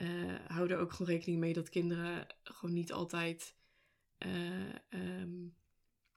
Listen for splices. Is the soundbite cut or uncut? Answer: uncut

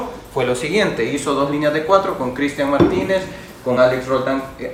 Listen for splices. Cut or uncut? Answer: uncut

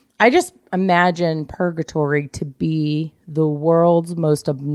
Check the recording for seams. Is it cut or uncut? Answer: uncut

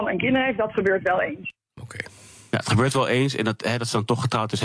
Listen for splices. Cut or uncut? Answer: uncut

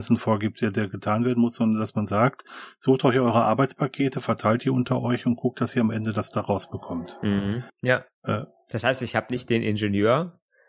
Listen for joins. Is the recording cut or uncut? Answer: cut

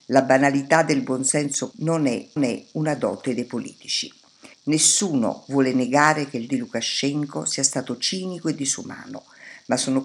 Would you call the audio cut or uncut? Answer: cut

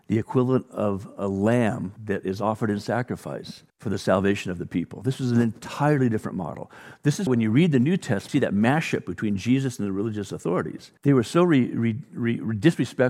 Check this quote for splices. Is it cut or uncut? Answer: cut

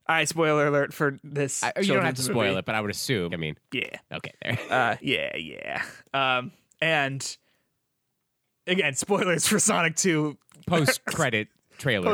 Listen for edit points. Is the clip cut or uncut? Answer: cut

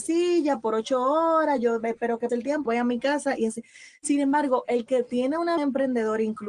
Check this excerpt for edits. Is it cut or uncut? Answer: cut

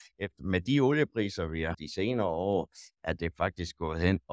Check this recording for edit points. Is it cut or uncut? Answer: cut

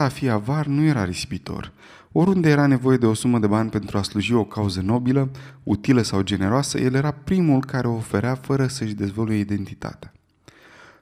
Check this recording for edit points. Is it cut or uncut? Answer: uncut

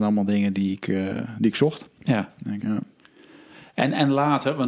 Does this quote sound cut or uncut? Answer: cut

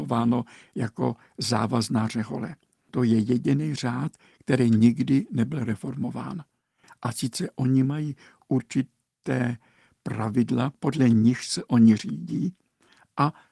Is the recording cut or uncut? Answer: uncut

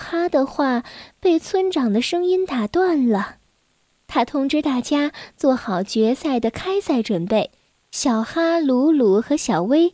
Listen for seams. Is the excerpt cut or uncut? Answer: uncut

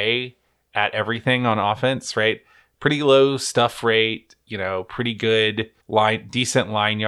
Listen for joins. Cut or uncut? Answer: cut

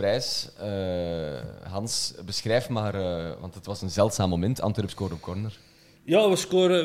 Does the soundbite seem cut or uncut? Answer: uncut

